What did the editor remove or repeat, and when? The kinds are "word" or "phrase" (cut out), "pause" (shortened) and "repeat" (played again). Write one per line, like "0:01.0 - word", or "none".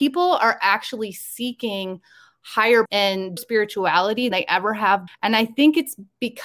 0:02.9 - word
0:03.4 - word
0:04.3 - word
0:05.1 - word